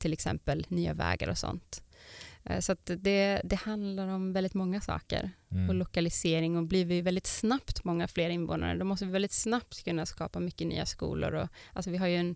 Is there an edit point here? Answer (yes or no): no